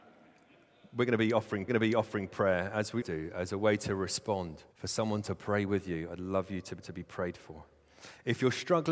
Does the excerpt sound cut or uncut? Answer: cut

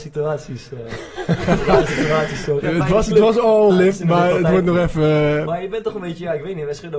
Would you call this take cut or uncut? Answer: cut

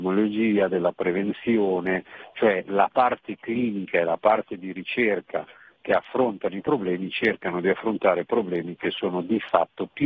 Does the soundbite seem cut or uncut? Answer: uncut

